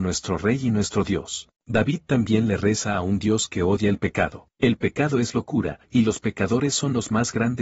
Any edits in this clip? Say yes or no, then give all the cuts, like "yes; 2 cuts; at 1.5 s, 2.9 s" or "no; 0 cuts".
yes; 3 cuts; at 1.6 s, 4.5 s, 5.8 s